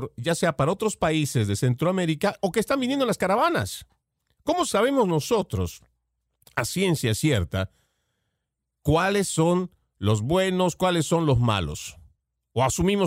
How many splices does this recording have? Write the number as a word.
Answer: zero